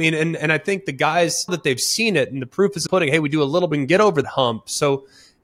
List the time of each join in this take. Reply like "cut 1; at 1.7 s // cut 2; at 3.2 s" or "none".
cut 1; at 1.5 s // cut 2; at 2.9 s // cut 3; at 3.7 s // cut 4; at 4.2 s